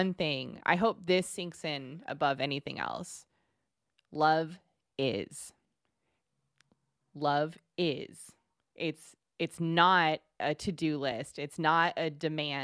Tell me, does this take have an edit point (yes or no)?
no